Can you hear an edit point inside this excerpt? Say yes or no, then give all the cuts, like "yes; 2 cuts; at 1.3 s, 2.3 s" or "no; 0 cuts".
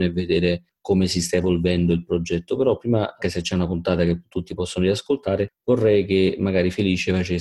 yes; 1 cut; at 3.2 s